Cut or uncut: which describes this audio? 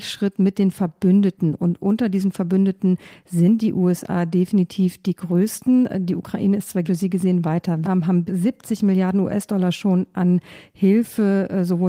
cut